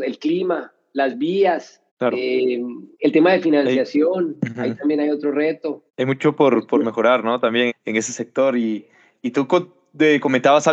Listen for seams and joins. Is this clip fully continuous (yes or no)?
no